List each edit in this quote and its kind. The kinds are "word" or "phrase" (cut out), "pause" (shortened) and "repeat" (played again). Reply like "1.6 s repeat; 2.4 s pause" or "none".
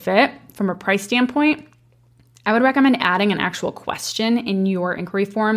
none